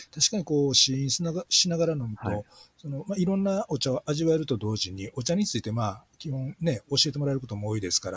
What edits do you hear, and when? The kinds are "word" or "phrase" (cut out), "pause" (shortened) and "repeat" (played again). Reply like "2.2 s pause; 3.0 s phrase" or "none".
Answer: none